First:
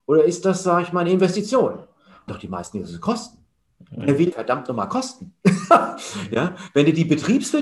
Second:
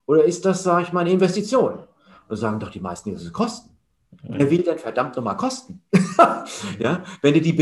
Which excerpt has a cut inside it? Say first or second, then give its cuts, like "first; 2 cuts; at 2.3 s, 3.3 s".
first; 2 cuts; at 2.3 s, 4.3 s